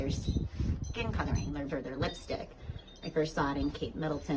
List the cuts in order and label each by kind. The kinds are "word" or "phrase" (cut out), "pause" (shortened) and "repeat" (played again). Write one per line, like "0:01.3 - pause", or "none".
0:01.7 - word